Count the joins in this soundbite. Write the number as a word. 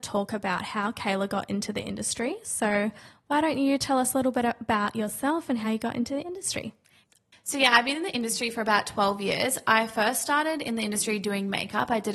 zero